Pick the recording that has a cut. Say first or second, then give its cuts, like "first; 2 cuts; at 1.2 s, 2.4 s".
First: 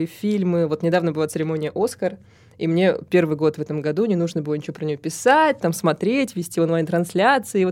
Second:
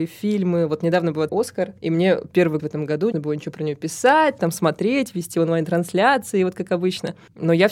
second; 4 cuts; at 1.3 s, 1.8 s, 2.6 s, 3.1 s